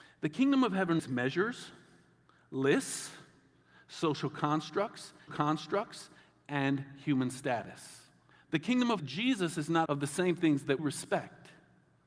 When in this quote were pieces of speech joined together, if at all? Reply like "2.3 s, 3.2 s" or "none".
1.0 s, 5.3 s, 8.3 s, 9.0 s, 9.9 s, 10.8 s